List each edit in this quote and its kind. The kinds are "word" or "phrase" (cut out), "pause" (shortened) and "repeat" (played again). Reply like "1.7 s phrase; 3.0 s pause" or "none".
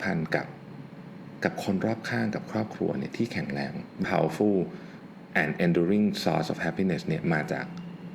4.0 s word